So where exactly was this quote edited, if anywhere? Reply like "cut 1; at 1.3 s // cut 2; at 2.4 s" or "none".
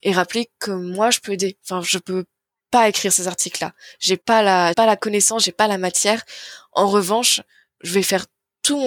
cut 1; at 4.2 s // cut 2; at 4.7 s